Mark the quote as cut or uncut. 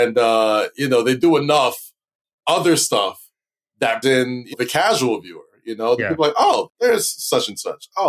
cut